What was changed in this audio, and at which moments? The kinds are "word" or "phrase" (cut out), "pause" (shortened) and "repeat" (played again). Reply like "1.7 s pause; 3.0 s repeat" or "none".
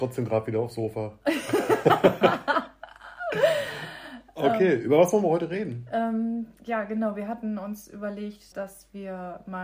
8.5 s word